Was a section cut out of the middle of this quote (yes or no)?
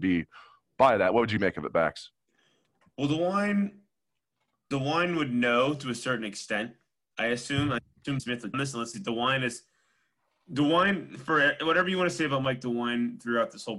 yes